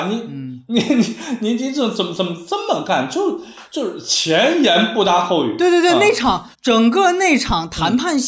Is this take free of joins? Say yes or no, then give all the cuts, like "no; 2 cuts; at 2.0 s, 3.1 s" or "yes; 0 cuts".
no; 2 cuts; at 3.6 s, 6.5 s